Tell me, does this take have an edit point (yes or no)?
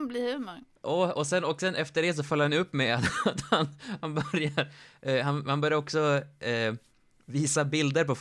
no